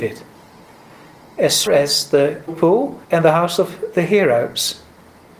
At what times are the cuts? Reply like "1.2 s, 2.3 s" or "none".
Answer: 1.7 s, 2.5 s, 3.0 s